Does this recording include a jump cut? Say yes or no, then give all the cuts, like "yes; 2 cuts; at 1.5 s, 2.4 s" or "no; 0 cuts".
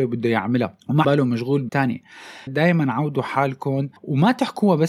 yes; 4 cuts; at 1.0 s, 1.7 s, 2.5 s, 4.0 s